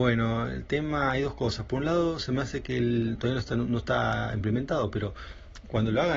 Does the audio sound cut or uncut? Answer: uncut